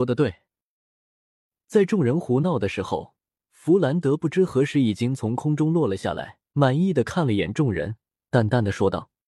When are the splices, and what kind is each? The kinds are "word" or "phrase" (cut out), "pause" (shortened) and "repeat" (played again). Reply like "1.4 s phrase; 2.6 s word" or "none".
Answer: 6.5 s pause